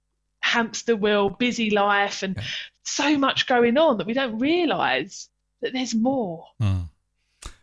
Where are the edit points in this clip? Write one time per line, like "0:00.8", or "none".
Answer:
none